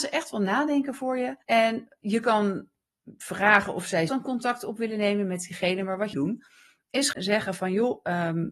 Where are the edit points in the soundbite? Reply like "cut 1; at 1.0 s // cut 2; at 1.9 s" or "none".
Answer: cut 1; at 1.4 s // cut 2; at 4.1 s // cut 3; at 6.1 s // cut 4; at 7.1 s